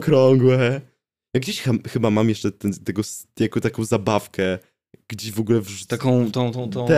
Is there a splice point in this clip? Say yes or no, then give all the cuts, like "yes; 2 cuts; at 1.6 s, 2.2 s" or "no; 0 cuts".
no; 0 cuts